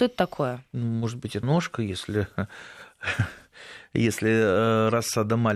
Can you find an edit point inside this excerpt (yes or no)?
yes